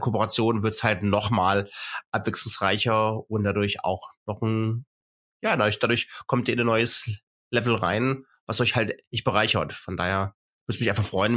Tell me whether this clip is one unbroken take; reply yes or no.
yes